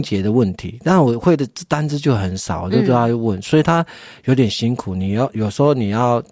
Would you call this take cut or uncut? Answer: uncut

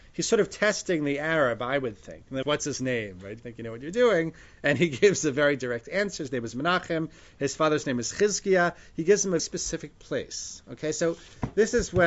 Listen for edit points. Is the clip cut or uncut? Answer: cut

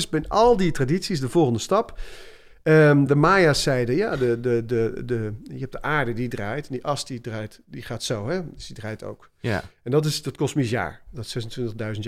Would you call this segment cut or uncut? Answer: uncut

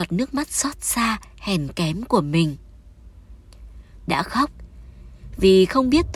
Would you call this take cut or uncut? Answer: cut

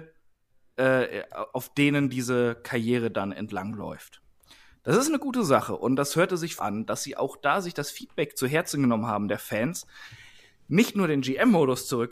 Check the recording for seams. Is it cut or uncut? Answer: cut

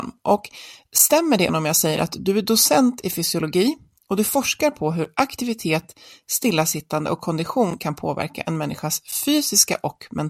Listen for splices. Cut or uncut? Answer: cut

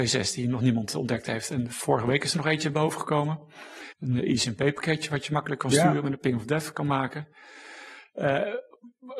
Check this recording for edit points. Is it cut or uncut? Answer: cut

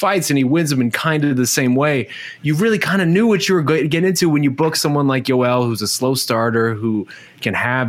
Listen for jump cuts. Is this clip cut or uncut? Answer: uncut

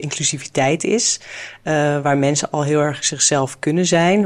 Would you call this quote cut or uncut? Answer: uncut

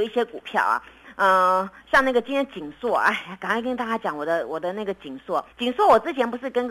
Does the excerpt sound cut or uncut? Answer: cut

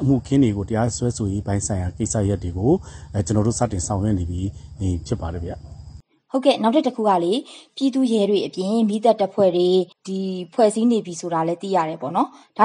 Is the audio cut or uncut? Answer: cut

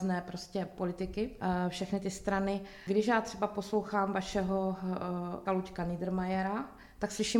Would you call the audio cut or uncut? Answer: cut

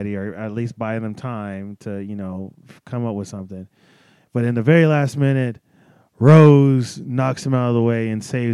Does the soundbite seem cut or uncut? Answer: uncut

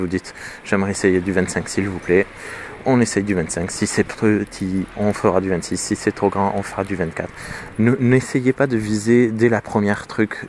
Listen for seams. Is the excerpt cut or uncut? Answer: uncut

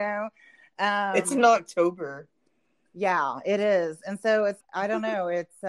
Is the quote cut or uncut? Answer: cut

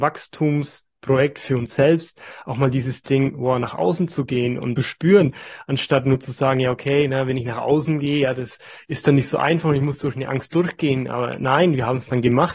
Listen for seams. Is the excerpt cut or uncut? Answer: cut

